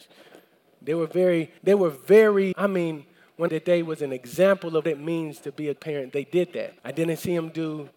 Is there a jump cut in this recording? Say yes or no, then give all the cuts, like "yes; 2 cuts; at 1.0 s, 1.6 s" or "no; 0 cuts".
yes; 6 cuts; at 1.6 s, 2.5 s, 3.5 s, 4.8 s, 5.8 s, 6.8 s